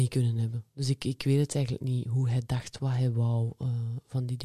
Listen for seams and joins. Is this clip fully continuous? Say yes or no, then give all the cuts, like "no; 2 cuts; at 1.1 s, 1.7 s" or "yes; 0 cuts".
yes; 0 cuts